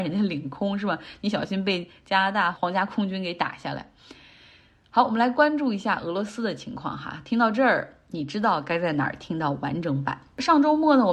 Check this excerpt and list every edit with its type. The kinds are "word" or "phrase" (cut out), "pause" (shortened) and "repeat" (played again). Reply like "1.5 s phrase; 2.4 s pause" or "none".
none